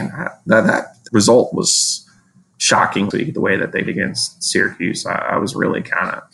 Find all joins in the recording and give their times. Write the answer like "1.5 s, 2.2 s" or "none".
1.1 s, 3.1 s, 3.9 s